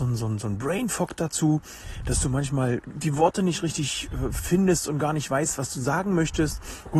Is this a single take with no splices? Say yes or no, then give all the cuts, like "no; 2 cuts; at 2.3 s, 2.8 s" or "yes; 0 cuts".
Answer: yes; 0 cuts